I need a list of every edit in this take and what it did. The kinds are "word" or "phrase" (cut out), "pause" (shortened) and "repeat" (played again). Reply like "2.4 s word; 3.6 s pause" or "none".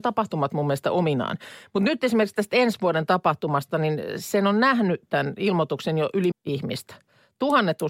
6.3 s word